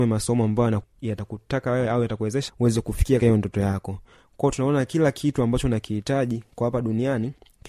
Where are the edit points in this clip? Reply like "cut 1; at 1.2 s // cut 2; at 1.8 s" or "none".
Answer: cut 1; at 2.5 s // cut 2; at 3.2 s